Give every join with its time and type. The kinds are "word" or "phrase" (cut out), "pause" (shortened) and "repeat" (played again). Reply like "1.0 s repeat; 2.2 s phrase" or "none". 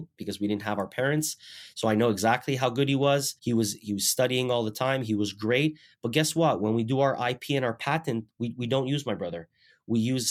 3.4 s pause